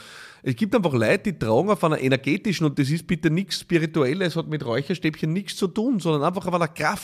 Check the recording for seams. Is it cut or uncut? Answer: uncut